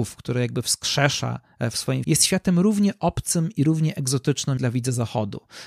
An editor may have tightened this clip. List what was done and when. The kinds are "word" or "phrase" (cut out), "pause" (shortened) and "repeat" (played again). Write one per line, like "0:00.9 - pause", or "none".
0:02.0 - phrase
0:04.6 - word